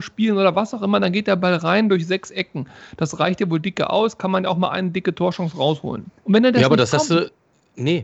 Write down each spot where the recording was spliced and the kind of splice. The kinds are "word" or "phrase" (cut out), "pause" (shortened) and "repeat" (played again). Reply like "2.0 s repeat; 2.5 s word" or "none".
6.2 s pause